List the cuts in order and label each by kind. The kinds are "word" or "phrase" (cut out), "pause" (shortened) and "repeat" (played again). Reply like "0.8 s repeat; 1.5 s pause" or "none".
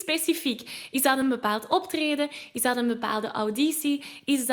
none

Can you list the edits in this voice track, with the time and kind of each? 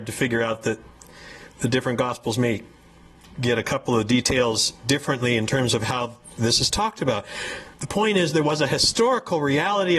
7.7 s pause

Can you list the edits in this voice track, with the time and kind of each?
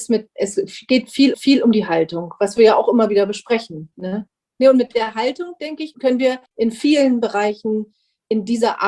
1.3 s repeat; 4.4 s pause; 5.9 s word; 6.5 s pause

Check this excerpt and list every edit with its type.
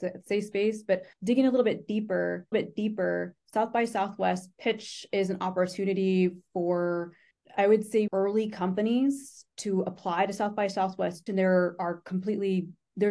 1.1 s pause; 2.5 s repeat; 7.3 s pause; 8.1 s word; 11.3 s word

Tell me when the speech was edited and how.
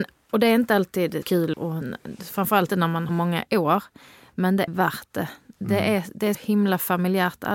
1.2 s word; 1.5 s word; 2.7 s word; 3.1 s phrase; 4.7 s word; 6.3 s word

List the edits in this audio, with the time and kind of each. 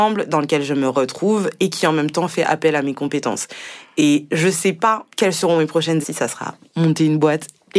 5.1 s pause; 6.0 s word

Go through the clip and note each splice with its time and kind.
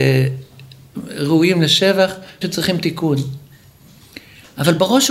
2.4 s word

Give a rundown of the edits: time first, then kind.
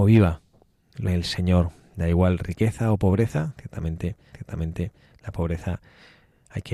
1.0 s phrase; 4.3 s repeat

